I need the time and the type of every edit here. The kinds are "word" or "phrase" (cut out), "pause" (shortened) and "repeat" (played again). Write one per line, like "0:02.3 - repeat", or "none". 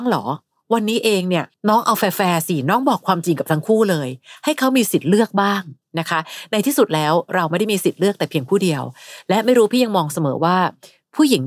0:01.5 - pause